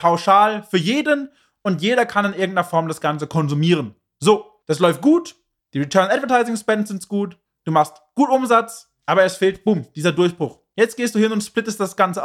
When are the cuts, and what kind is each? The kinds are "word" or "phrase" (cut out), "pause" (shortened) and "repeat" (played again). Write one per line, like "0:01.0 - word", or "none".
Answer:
none